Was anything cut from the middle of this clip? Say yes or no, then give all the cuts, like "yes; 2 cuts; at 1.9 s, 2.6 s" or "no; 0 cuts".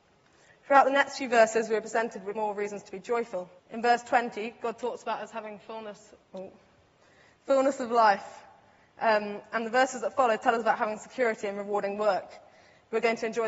yes; 3 cuts; at 2.4 s, 3.6 s, 6.2 s